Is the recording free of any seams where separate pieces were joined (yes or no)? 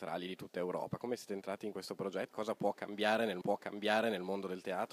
no